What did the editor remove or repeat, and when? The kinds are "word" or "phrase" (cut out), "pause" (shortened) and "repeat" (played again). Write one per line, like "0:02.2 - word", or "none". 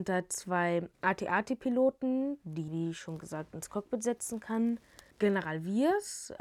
0:00.9 - pause
0:02.7 - word
0:05.1 - pause